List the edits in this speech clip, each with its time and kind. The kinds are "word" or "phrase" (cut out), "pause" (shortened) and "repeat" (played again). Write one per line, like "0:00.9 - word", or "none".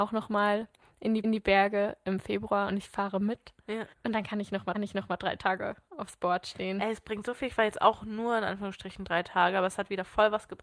0:01.2 - repeat
0:03.9 - pause
0:04.7 - repeat